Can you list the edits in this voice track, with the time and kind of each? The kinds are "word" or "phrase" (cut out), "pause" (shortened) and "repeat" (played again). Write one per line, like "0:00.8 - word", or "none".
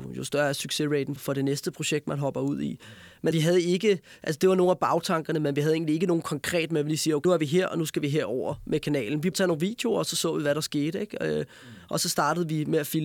0:01.2 - word
0:03.3 - word
0:07.2 - word
0:09.3 - word